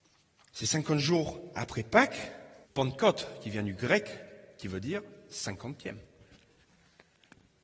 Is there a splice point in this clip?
yes; 1 cut; at 2.6 s

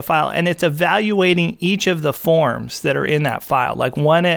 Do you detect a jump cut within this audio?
no; 0 cuts

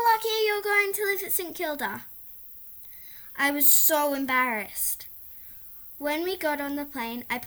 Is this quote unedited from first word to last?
yes; 0 cuts

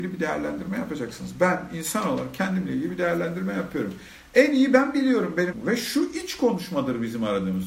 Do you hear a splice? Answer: yes; 1 cut; at 5.5 s

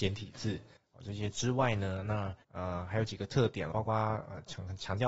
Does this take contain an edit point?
yes; 1 cut; at 3.7 s

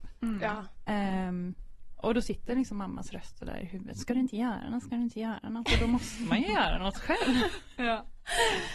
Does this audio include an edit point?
no; 0 cuts

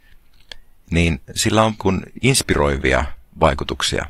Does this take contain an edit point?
yes; 1 cut; at 1.8 s

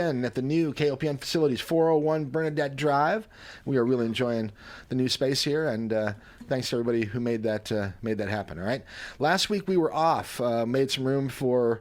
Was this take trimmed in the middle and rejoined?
no; 0 cuts

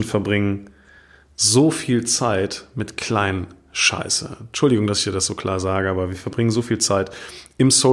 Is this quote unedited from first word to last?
yes; 0 cuts

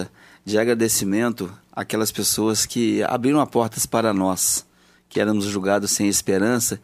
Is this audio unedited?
yes; 0 cuts

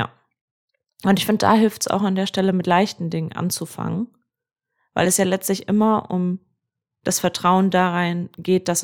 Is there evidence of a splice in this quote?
no; 0 cuts

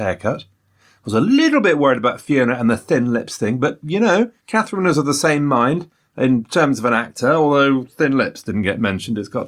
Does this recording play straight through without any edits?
no; 1 cut; at 4.4 s

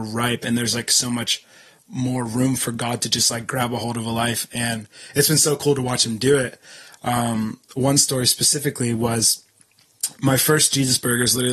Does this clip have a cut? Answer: no; 0 cuts

